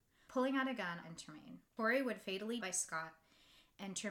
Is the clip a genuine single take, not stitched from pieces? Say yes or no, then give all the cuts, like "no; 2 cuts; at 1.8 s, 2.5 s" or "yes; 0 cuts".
no; 3 cuts; at 1.0 s, 1.7 s, 2.6 s